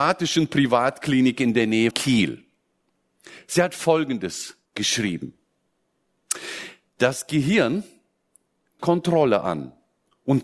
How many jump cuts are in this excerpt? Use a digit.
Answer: 3